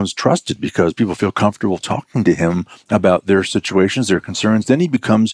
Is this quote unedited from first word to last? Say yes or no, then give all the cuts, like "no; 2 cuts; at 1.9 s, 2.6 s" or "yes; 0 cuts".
yes; 0 cuts